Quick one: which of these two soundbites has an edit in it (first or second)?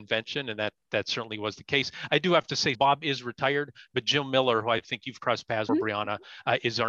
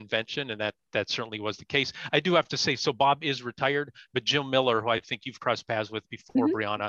first